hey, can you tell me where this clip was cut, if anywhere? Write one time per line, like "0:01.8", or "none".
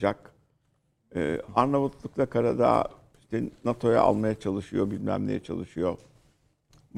none